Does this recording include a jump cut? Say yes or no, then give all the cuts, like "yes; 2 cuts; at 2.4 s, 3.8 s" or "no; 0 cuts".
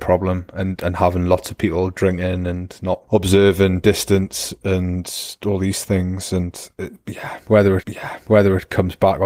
yes; 1 cut; at 7.8 s